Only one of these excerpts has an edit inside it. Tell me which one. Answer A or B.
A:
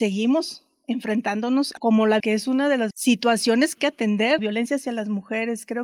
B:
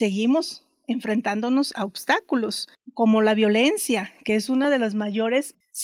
A